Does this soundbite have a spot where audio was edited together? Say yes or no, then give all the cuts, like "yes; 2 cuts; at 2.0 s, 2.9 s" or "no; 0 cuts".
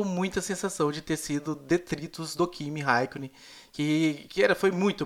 no; 0 cuts